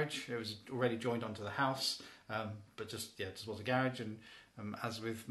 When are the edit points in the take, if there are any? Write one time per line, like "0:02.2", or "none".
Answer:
none